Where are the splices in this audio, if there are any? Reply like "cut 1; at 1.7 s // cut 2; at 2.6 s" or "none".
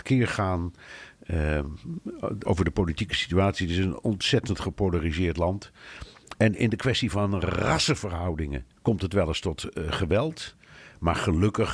cut 1; at 2.4 s // cut 2; at 8.7 s